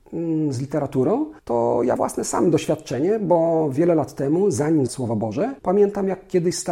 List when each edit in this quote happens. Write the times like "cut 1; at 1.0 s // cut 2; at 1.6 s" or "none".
cut 1; at 1.4 s // cut 2; at 2.0 s // cut 3; at 4.9 s // cut 4; at 5.6 s